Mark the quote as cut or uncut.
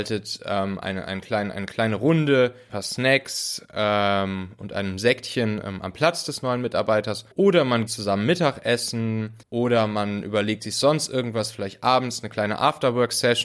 cut